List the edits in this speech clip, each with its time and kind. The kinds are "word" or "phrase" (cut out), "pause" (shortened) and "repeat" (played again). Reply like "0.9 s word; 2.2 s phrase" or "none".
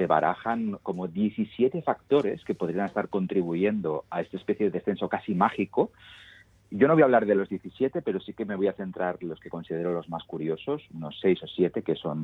none